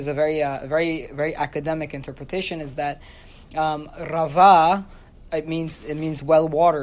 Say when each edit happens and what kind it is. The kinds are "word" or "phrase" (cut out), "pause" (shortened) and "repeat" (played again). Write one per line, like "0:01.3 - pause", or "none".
0:05.3 - word